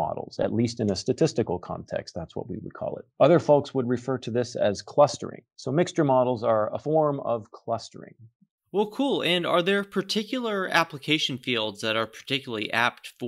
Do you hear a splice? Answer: no; 0 cuts

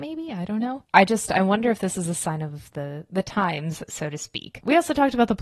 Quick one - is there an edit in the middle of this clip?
no; 0 cuts

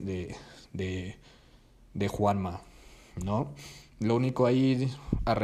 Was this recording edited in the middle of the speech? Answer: no; 0 cuts

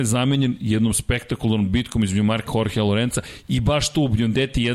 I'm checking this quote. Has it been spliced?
yes; 1 cut; at 2.5 s

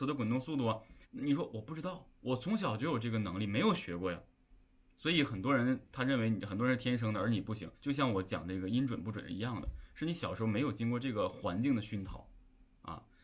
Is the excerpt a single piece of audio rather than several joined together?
no; 3 cuts; at 1.0 s, 2.1 s, 7.7 s

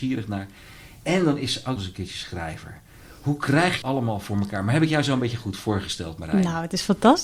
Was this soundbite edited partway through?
yes; 2 cuts; at 1.8 s, 3.8 s

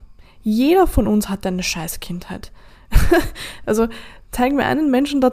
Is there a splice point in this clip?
no; 0 cuts

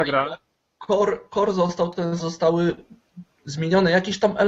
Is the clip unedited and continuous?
no; 1 cut; at 2.2 s

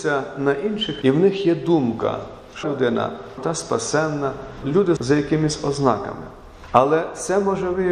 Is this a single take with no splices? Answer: no; 5 cuts; at 1.0 s, 2.6 s, 3.4 s, 4.6 s, 5.0 s

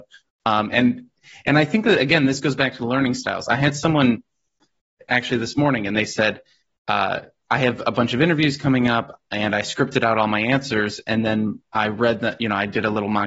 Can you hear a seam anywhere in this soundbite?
no; 0 cuts

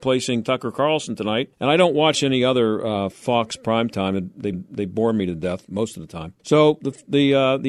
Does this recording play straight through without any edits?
no; 3 cuts; at 1.5 s, 4.5 s, 6.4 s

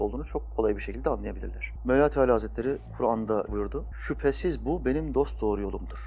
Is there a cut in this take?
yes; 1 cut; at 3.5 s

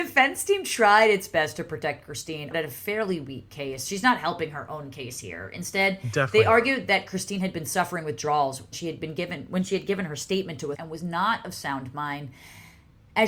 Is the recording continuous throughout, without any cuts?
no; 3 cuts; at 2.5 s, 8.7 s, 10.7 s

